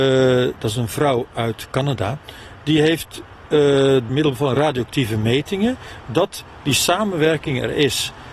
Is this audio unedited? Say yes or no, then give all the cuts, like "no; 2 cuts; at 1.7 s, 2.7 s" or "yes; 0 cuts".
no; 2 cuts; at 4.1 s, 6.0 s